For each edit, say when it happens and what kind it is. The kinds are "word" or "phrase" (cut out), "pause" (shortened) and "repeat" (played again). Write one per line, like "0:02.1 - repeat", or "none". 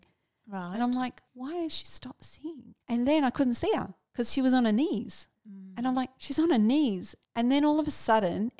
0:01.3 - pause
0:02.8 - pause
0:05.3 - pause
0:07.2 - pause